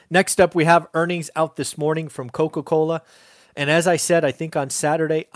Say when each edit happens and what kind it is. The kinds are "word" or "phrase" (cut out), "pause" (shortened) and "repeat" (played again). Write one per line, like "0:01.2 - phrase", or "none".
none